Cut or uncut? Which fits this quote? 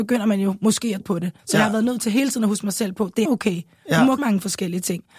cut